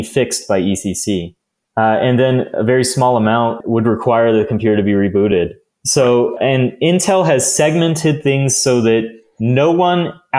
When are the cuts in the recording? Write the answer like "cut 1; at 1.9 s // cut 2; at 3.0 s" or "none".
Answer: none